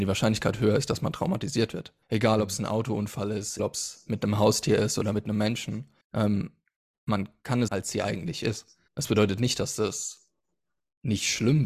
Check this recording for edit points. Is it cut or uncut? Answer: cut